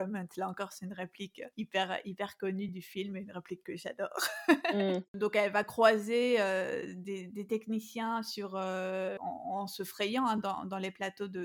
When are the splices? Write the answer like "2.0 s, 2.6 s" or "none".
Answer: none